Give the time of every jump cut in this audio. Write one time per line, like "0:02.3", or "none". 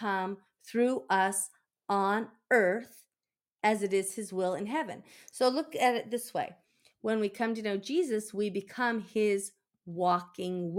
none

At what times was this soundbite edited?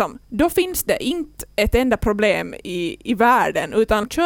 none

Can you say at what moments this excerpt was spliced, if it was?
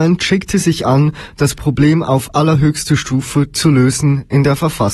none

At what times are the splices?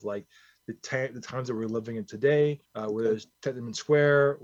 0:02.6
0:03.3

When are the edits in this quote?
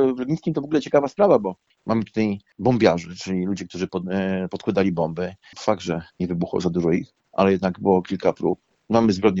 0:06.1

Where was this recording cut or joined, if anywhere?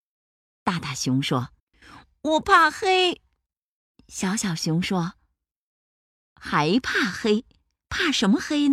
0:01.6

